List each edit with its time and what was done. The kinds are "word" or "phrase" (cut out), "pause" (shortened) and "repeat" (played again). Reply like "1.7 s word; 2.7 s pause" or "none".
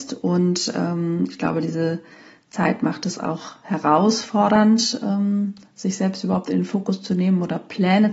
none